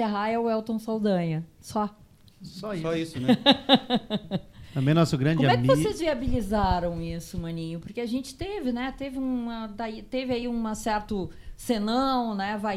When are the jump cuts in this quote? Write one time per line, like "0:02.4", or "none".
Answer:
none